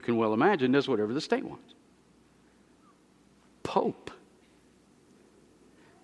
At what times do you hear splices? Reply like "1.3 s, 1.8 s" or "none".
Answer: 3.6 s